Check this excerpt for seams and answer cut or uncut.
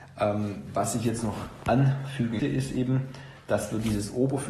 cut